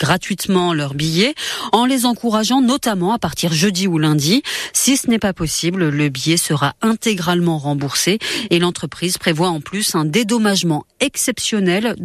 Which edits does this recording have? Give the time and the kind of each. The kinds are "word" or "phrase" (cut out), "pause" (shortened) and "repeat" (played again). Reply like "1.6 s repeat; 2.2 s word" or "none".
none